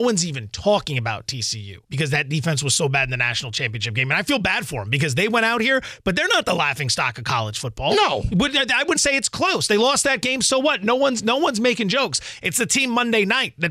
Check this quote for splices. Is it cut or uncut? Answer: cut